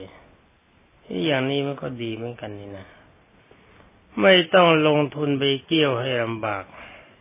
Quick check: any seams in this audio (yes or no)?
no